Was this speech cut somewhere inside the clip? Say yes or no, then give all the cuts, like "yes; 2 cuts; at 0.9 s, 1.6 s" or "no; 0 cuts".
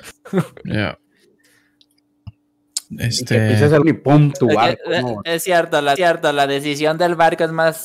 yes; 4 cuts; at 2.9 s, 3.8 s, 4.3 s, 6.0 s